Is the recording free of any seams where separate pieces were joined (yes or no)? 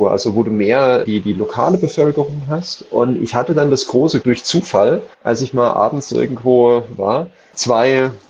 no